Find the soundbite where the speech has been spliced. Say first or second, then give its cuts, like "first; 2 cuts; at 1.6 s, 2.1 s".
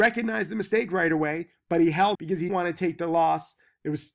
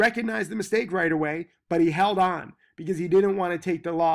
first; 2 cuts; at 2.1 s, 2.5 s